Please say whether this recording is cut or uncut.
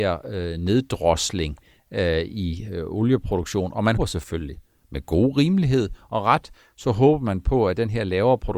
cut